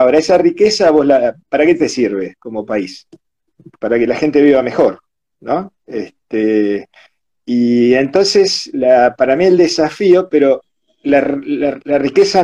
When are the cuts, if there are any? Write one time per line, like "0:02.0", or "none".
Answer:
0:01.4
0:05.8
0:10.7